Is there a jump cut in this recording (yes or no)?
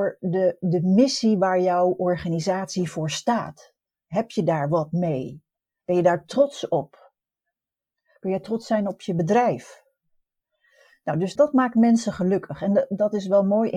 yes